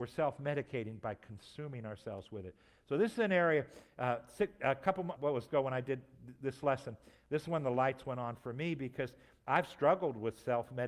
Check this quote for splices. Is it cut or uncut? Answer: cut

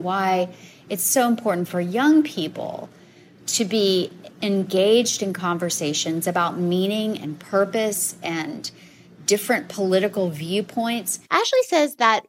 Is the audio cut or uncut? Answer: uncut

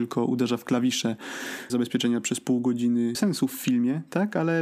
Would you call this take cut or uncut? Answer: cut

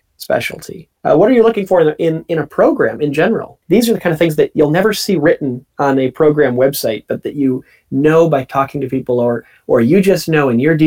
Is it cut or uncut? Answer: cut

